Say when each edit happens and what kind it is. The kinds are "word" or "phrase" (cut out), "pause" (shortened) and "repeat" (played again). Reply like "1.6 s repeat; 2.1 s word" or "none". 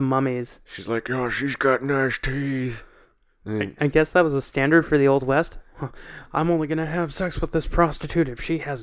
none

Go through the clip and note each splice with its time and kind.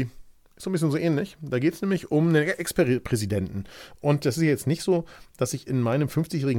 none

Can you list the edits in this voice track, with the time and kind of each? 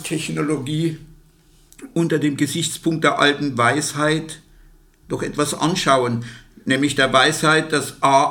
none

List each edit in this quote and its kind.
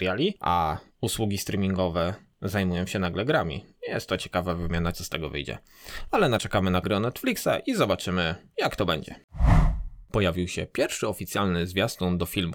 4.9 s word; 6.4 s word; 6.8 s word

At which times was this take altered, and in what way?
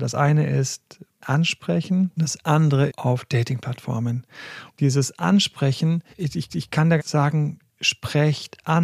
1.2 s phrase; 2.9 s word; 6.1 s pause; 6.5 s repeat; 7.0 s phrase; 7.7 s pause

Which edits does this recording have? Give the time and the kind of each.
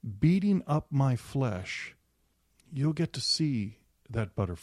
none

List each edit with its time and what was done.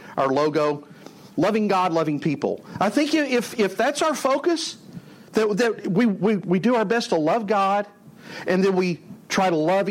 1.3 s pause

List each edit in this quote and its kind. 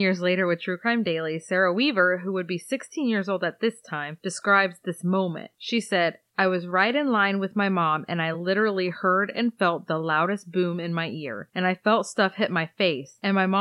none

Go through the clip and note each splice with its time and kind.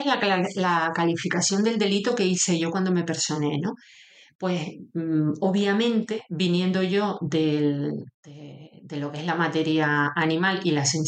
none

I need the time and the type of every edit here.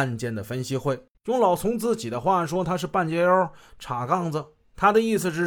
1.1 s pause

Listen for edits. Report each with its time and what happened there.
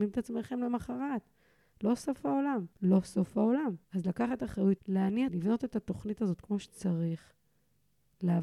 2.7 s pause; 3.8 s pause; 4.8 s word; 5.3 s phrase

